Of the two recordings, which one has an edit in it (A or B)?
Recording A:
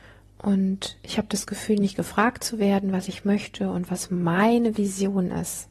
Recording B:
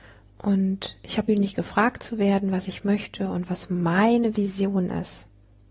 B